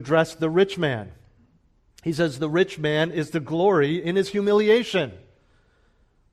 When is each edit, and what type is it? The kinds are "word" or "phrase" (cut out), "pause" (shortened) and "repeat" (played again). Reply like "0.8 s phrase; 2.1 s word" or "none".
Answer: none